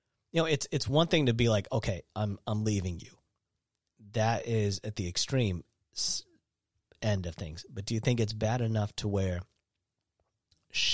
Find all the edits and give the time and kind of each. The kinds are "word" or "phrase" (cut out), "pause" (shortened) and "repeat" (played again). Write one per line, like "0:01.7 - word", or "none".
none